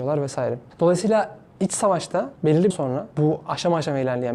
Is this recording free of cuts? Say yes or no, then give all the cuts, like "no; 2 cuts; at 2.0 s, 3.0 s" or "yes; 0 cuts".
no; 1 cut; at 2.7 s